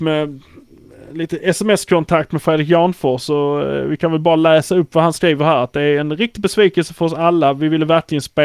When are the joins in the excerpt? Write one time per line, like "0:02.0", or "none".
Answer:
none